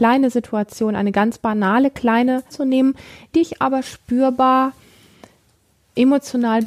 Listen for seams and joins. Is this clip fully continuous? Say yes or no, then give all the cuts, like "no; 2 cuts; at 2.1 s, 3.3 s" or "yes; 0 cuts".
no; 2 cuts; at 2.5 s, 3.3 s